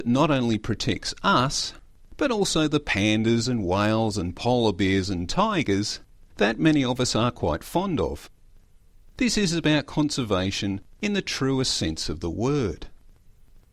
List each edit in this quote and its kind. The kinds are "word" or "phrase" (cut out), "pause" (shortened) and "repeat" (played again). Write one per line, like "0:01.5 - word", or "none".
none